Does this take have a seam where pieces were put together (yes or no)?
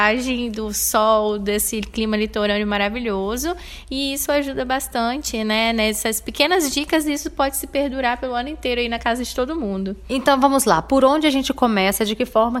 no